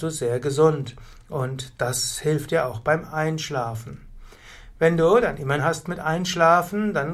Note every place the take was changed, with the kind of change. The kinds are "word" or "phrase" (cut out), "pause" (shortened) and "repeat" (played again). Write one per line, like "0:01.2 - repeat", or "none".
0:05.6 - phrase